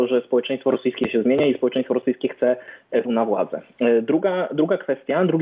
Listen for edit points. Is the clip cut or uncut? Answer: cut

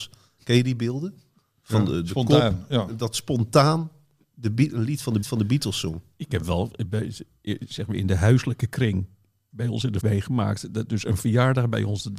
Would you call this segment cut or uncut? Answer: cut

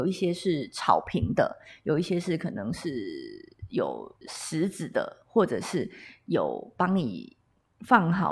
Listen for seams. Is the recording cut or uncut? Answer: cut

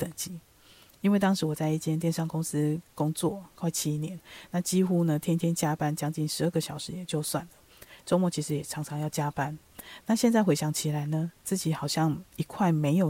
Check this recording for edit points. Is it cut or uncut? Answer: uncut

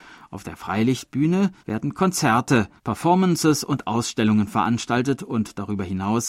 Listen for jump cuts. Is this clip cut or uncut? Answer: cut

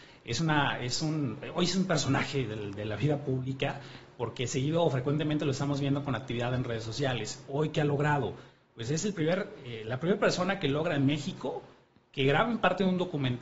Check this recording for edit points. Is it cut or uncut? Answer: uncut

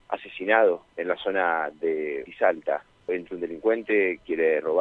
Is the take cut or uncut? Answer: cut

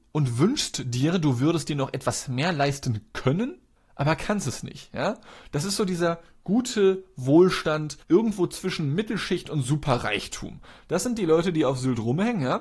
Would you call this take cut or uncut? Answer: cut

